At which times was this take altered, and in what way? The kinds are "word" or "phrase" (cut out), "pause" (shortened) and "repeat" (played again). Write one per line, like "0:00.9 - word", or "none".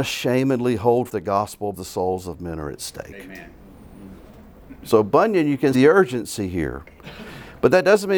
0:01.1 - word
0:01.7 - word
0:05.7 - word